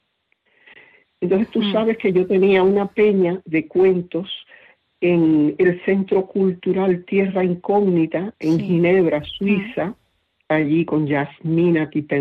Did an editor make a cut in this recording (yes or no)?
no